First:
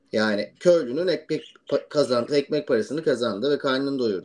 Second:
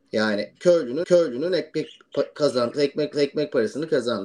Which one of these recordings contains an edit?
second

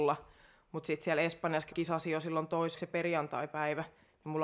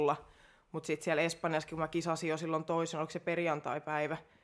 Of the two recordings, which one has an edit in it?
first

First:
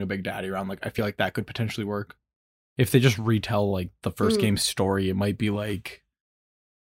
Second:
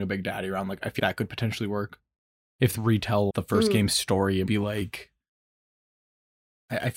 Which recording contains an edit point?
second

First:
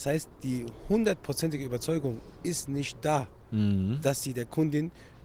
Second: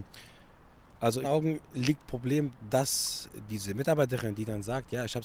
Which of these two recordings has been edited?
second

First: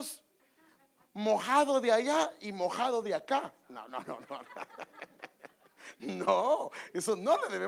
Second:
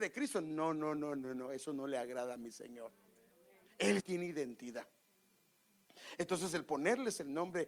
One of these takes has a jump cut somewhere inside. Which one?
second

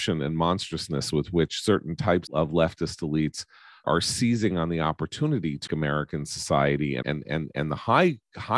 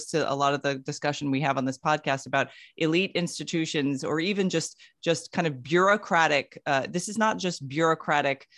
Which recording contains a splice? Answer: first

